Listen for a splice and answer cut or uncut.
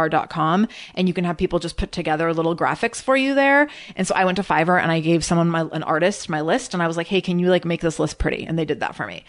uncut